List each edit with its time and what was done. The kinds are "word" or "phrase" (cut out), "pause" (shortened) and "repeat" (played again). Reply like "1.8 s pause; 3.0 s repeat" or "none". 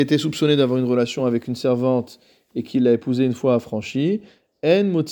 none

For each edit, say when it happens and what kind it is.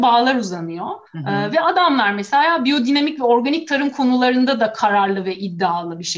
1.1 s pause

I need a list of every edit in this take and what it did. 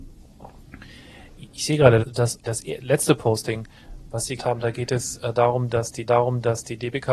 2.0 s word; 2.4 s word; 4.4 s word; 6.1 s repeat

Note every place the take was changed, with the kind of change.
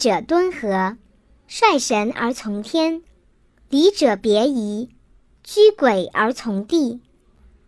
none

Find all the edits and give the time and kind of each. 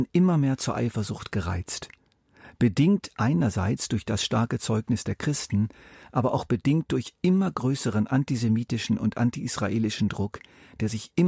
none

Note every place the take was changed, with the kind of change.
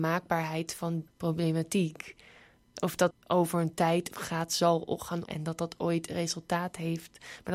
1.1 s word; 3.1 s word; 4.1 s word; 5.3 s word

